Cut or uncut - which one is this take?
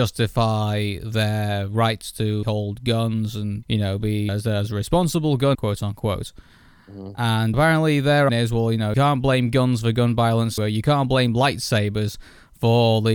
cut